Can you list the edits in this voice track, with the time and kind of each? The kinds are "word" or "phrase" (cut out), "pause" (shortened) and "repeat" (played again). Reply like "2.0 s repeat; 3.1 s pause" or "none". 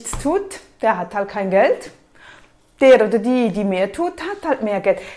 none